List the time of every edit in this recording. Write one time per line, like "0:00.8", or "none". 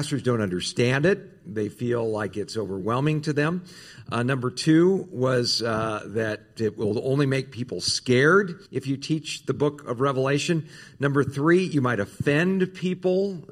0:08.7